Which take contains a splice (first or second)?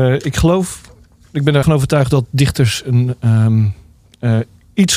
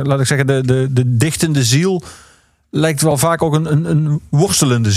first